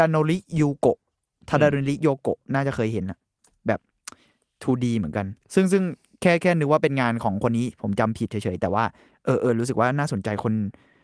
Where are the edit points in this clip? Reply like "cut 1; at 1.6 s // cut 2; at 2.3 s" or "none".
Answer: none

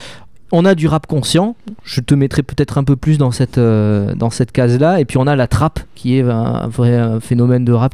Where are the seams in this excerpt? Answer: none

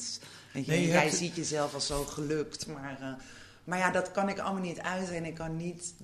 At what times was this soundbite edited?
none

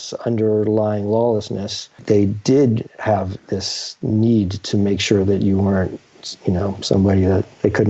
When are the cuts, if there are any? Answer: none

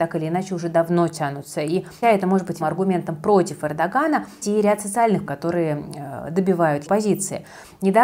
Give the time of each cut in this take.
cut 1; at 2.0 s // cut 2; at 2.6 s // cut 3; at 4.4 s // cut 4; at 5.3 s // cut 5; at 6.9 s

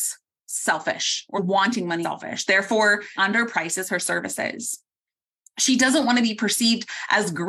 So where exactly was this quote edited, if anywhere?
cut 1; at 1.4 s // cut 2; at 2.0 s // cut 3; at 3.2 s

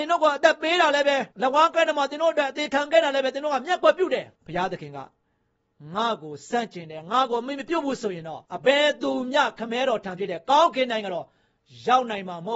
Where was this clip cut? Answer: cut 1; at 1.3 s // cut 2; at 4.4 s // cut 3; at 8.5 s

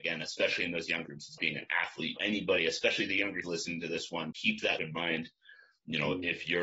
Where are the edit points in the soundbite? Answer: cut 1; at 1.1 s // cut 2; at 1.4 s // cut 3; at 2.2 s // cut 4; at 3.4 s // cut 5; at 4.3 s // cut 6; at 4.8 s

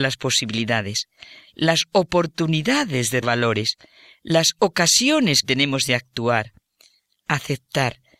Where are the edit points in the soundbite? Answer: cut 1; at 3.2 s // cut 2; at 5.4 s

